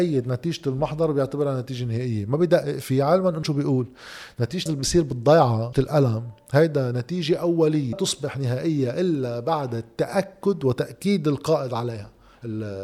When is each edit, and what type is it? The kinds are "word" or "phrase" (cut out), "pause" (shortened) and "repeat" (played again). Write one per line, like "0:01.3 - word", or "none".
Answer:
0:03.4 - word
0:04.7 - word
0:05.7 - word
0:07.9 - word